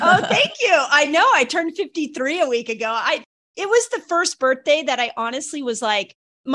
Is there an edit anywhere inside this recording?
no; 0 cuts

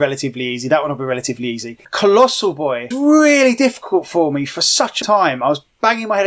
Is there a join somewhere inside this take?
yes; 2 cuts; at 2.9 s, 5.0 s

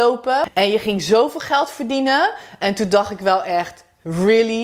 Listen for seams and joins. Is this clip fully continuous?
yes; 0 cuts

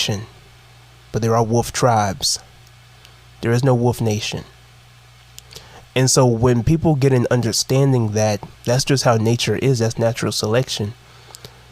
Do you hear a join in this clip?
yes; 1 cut; at 8.5 s

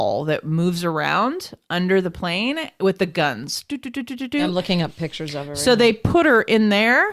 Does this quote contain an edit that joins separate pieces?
no; 0 cuts

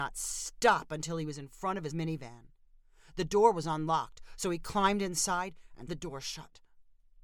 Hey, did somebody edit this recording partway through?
yes; 2 cuts; at 1.9 s, 5.9 s

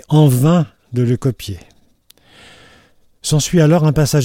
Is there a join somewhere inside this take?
no; 0 cuts

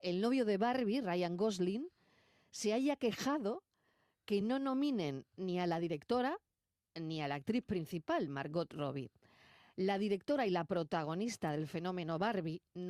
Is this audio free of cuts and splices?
yes; 0 cuts

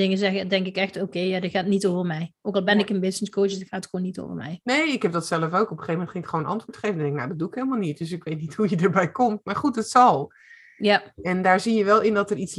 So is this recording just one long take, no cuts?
yes; 0 cuts

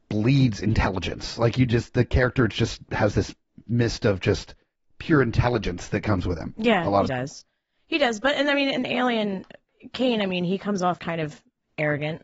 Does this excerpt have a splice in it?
yes; 3 cuts; at 7.1 s, 8.8 s, 11.0 s

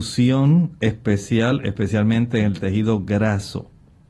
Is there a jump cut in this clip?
no; 0 cuts

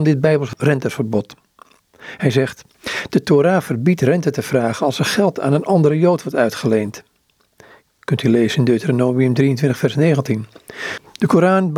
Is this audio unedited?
yes; 0 cuts

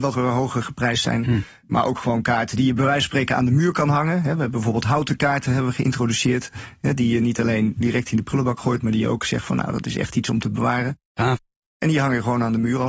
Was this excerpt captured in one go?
yes; 0 cuts

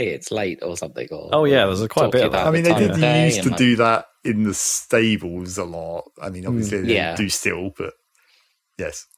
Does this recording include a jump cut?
no; 0 cuts

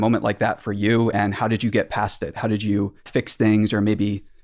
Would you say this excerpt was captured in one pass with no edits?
no; 1 cut; at 3.0 s

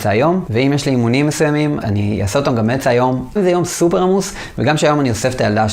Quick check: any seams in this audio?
yes; 2 cuts; at 1.8 s, 3.4 s

